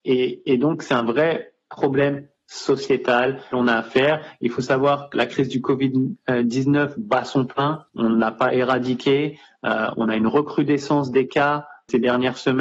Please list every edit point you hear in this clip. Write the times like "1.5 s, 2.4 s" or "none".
3.5 s, 5.1 s

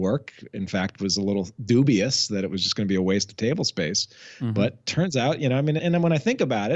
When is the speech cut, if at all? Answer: 5.8 s

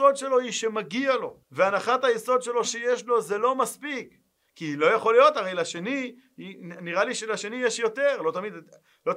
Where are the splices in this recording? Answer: 1.4 s, 2.6 s

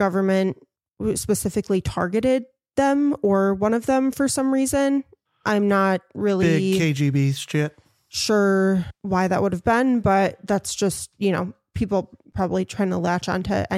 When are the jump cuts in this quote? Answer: none

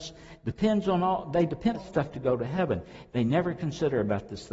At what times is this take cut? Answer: 1.7 s

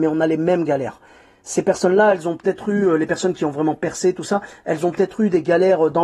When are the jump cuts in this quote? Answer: none

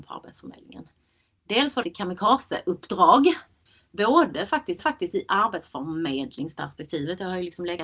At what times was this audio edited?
1.8 s, 4.8 s

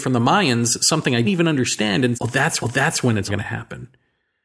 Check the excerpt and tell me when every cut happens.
1.2 s, 2.1 s, 2.6 s, 3.3 s

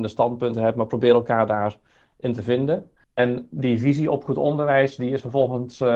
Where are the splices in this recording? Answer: none

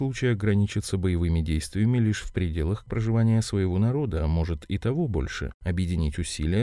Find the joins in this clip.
2.9 s

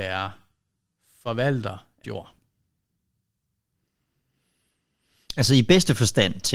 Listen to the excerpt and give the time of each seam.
2.0 s

